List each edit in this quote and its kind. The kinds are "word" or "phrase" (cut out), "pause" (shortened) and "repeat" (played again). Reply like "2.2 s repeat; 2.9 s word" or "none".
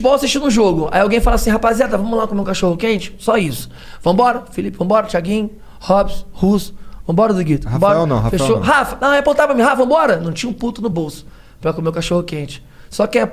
none